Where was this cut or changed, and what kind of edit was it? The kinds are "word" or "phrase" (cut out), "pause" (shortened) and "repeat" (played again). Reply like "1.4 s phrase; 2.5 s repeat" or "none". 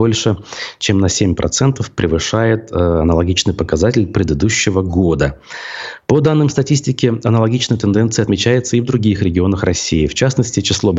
none